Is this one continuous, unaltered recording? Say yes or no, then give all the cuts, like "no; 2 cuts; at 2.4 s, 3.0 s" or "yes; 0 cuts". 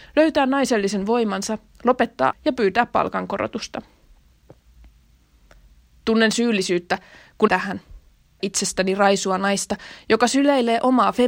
no; 3 cuts; at 2.3 s, 7.5 s, 8.4 s